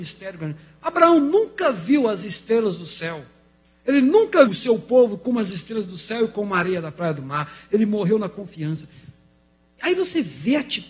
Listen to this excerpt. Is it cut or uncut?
cut